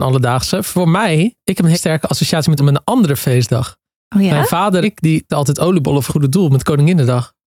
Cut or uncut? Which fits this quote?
cut